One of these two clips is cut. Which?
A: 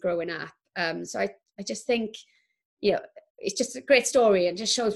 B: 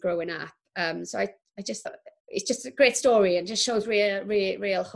B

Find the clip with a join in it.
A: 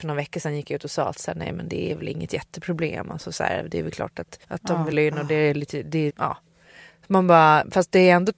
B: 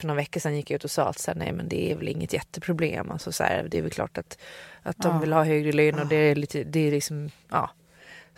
A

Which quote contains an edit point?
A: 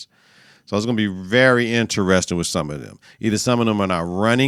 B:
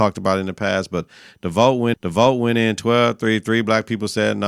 B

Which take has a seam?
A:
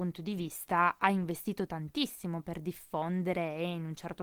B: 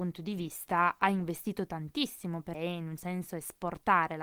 B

